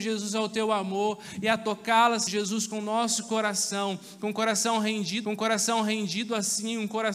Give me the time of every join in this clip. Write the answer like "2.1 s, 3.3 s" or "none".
2.3 s, 5.3 s